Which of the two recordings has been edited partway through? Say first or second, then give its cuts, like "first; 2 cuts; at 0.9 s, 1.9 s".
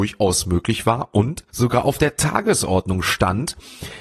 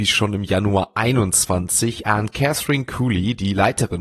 first; 1 cut; at 1.5 s